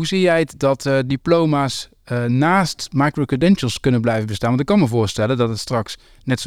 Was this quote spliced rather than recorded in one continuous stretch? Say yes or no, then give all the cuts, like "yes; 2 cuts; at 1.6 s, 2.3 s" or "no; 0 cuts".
no; 0 cuts